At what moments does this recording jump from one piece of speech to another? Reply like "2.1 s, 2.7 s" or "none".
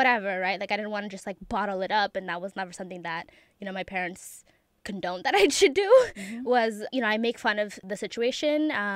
none